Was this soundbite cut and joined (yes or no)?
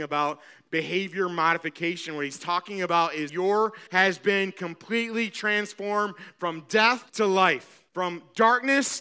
yes